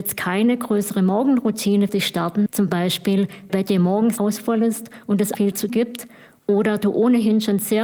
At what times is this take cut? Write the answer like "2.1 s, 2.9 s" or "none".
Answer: 1.9 s, 2.5 s, 3.5 s, 4.2 s, 5.3 s, 5.7 s

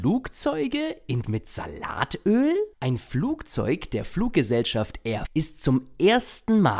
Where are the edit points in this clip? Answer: 1.2 s, 2.7 s, 5.3 s

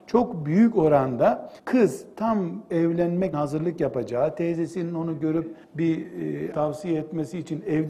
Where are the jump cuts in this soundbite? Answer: 1.6 s, 3.3 s, 5.6 s, 6.5 s

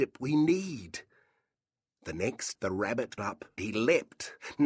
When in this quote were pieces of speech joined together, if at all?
2.5 s, 3.2 s, 3.6 s

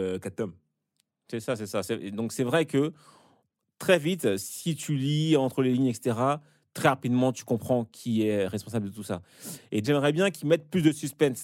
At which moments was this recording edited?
9.8 s

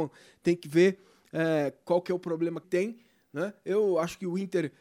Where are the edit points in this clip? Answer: 2.6 s

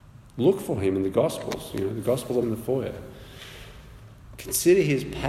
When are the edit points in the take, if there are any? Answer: 2.4 s

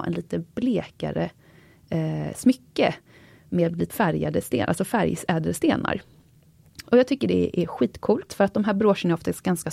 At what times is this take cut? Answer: 3.9 s

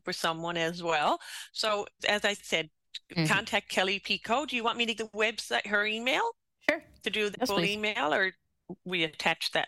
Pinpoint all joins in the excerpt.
2.0 s, 5.0 s, 7.3 s

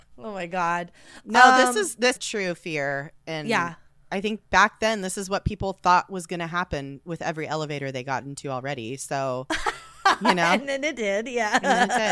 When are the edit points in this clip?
2.2 s, 4.0 s

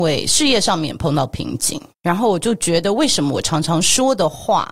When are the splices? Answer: 1.9 s

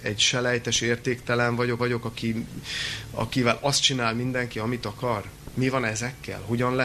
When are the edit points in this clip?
1.8 s

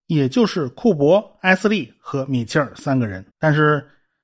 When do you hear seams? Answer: 3.3 s

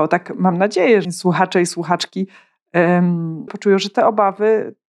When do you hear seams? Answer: 1.0 s, 3.5 s

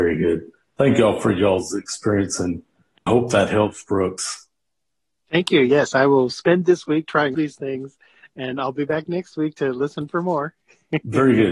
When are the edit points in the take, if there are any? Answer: 3.1 s, 7.3 s

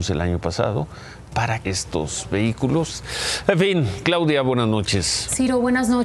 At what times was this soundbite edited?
1.6 s

